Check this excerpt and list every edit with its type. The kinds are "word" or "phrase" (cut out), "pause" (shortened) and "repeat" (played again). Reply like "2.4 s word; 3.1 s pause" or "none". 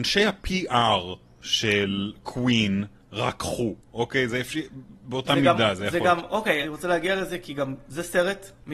6.6 s phrase